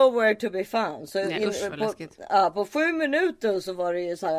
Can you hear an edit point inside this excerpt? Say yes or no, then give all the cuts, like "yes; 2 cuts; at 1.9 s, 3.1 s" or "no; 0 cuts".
no; 0 cuts